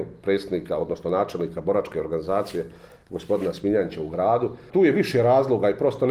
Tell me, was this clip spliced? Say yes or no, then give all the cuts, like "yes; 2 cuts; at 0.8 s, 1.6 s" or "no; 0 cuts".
no; 0 cuts